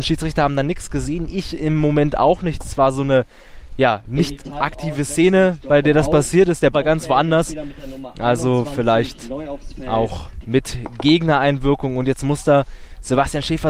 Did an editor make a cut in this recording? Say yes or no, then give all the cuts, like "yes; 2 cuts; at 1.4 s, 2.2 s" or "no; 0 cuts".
yes; 3 cuts; at 4.0 s, 6.7 s, 10.4 s